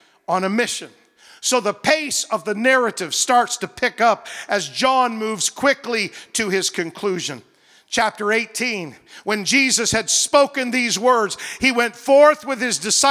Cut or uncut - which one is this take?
uncut